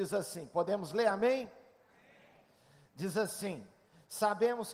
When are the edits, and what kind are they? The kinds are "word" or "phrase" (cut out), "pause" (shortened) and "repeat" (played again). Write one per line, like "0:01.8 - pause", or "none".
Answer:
none